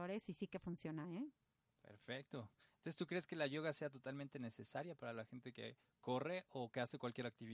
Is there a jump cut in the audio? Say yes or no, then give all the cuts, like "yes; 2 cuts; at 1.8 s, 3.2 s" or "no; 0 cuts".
no; 0 cuts